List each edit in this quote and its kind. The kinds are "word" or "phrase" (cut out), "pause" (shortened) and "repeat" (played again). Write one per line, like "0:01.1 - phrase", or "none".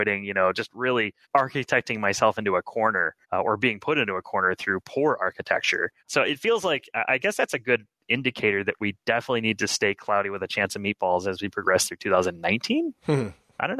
0:01.2 - pause
0:03.2 - pause
0:06.0 - pause